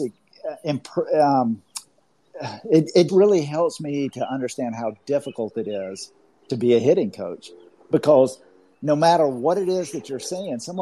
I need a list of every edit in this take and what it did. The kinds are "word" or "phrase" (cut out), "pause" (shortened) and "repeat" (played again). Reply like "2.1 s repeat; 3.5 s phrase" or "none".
3.1 s word